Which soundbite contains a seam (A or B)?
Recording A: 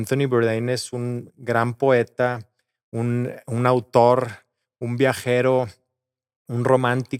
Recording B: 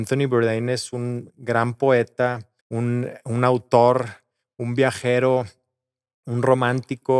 B